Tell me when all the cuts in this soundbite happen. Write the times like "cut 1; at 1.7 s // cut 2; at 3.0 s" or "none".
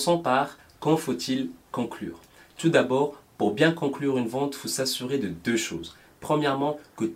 none